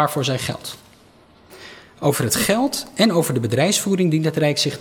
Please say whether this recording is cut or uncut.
uncut